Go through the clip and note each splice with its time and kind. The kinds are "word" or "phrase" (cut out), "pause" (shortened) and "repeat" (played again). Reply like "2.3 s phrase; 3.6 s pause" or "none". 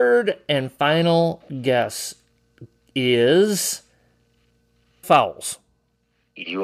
5.0 s word